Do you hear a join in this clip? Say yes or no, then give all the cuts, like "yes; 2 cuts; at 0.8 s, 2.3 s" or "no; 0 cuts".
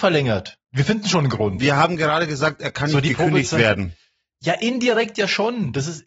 no; 0 cuts